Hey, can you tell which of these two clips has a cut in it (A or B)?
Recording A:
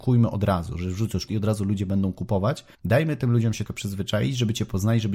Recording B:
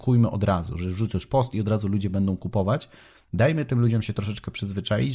A